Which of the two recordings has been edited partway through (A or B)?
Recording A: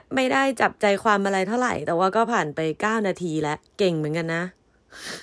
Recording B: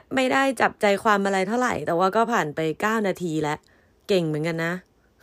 A